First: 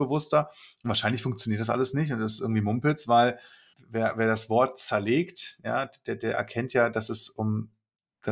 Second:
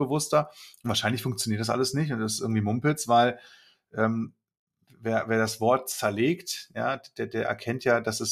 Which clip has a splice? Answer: first; 1 cut; at 3.7 s

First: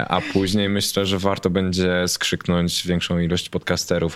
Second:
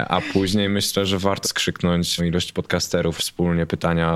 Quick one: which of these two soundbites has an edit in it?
second; 3 cuts; at 1.4 s, 2.2 s, 3.2 s

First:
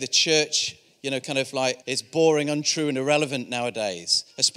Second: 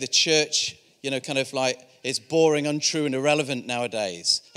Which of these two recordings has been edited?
first; 1 cut; at 1.8 s

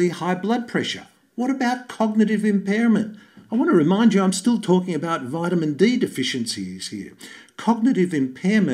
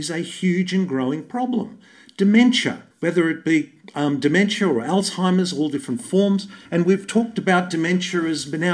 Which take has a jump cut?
second; 2 cuts; at 2.9 s, 6.7 s

